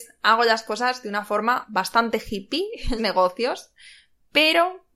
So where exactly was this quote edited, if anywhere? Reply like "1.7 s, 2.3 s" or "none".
3.0 s